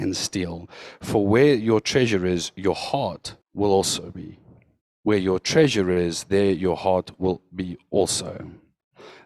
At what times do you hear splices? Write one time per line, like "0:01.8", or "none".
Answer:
0:03.4
0:04.8